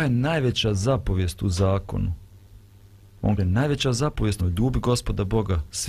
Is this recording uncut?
no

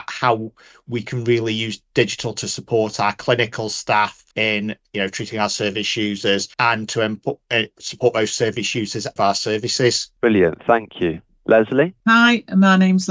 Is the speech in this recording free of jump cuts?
no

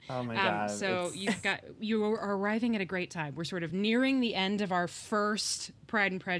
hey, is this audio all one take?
yes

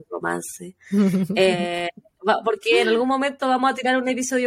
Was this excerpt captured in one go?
yes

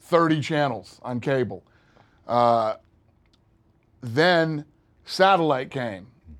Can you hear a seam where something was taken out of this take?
no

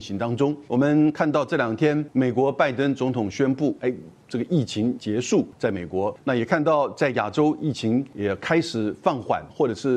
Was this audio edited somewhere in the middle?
no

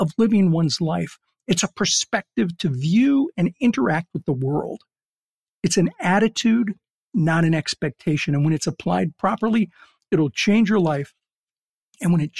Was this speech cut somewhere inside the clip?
no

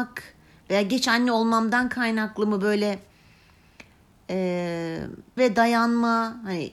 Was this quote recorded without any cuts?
no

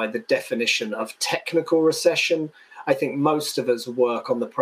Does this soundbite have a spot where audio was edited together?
no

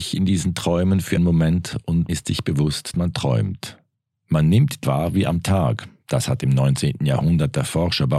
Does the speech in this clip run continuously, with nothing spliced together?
no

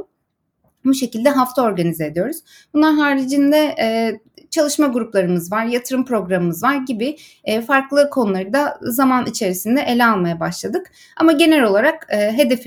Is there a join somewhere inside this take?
no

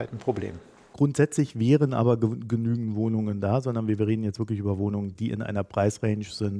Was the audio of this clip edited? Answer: no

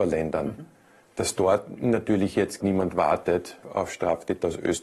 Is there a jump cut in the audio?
yes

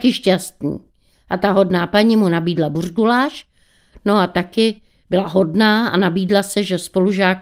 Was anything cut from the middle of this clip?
no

